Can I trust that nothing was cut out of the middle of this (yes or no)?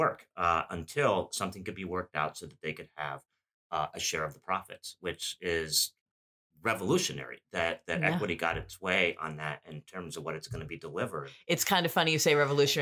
yes